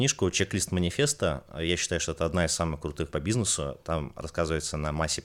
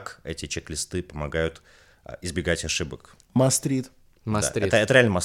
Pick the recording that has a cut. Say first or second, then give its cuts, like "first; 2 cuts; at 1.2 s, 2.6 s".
first; 1 cut; at 3.1 s